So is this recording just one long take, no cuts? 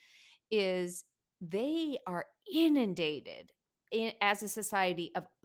yes; 0 cuts

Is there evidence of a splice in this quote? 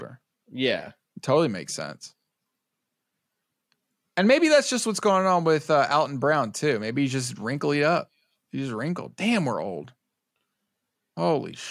no; 0 cuts

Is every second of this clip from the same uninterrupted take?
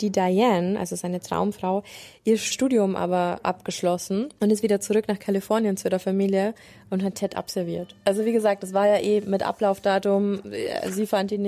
yes; 0 cuts

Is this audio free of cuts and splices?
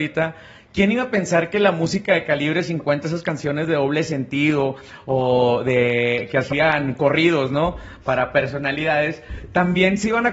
yes; 0 cuts

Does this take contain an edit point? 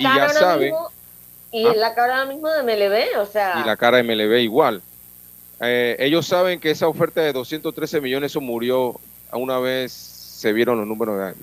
no; 0 cuts

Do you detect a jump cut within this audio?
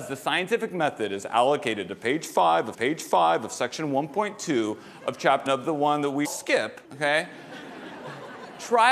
yes; 4 cuts; at 2.7 s, 5.5 s, 6.2 s, 6.8 s

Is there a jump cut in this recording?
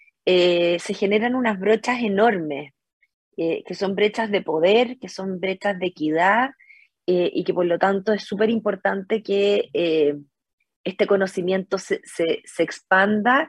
no; 0 cuts

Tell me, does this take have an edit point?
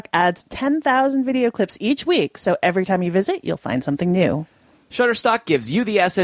no; 0 cuts

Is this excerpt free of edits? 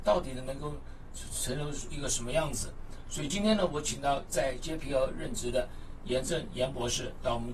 yes; 0 cuts

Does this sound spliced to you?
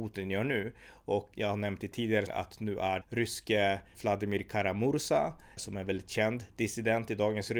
yes; 5 cuts; at 1.3 s, 2.3 s, 3.0 s, 3.9 s, 5.6 s

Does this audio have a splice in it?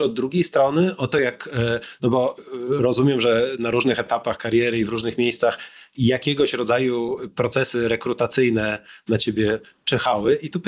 no; 0 cuts

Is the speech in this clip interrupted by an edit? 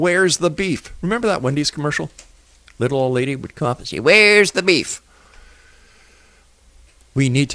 no; 0 cuts

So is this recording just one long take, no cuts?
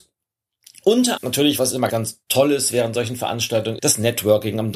no; 4 cuts; at 1.2 s, 1.6 s, 1.9 s, 3.8 s

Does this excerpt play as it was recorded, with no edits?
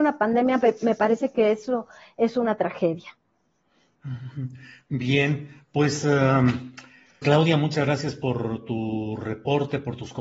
no; 1 cut; at 7.2 s

